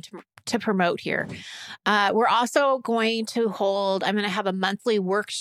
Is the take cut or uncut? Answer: uncut